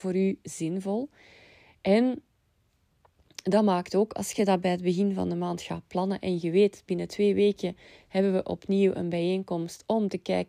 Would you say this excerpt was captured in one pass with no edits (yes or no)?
yes